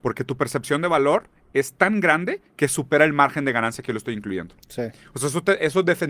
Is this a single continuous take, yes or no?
yes